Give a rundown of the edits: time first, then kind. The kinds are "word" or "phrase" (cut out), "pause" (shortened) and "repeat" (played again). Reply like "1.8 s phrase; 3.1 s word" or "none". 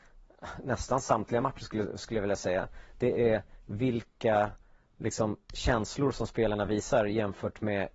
none